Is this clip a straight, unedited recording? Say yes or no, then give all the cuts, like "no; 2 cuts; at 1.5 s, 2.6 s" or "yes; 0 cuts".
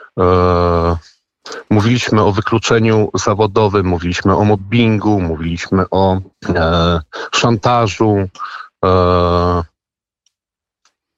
no; 1 cut; at 6.3 s